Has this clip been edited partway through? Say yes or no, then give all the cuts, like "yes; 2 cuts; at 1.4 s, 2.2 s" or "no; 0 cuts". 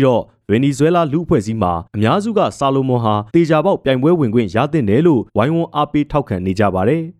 yes; 3 cuts; at 1.9 s, 3.3 s, 5.3 s